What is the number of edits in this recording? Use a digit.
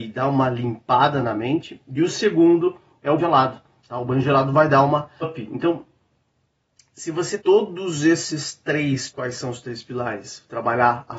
4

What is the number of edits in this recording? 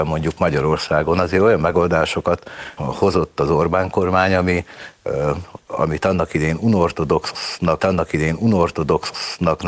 2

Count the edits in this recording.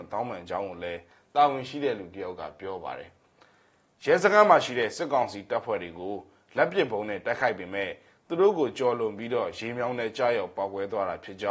0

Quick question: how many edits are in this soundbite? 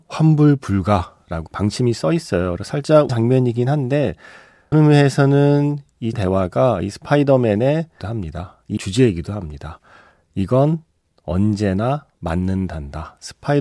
6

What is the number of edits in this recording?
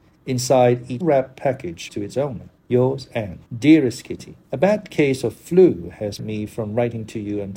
6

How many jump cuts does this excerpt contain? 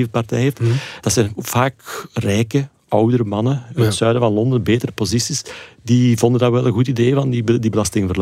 0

